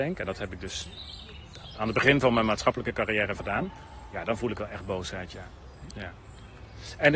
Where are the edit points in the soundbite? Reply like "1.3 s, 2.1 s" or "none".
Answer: 1.7 s, 3.4 s